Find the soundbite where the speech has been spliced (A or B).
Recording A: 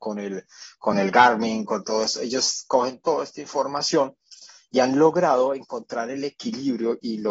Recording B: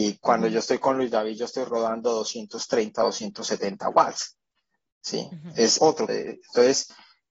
B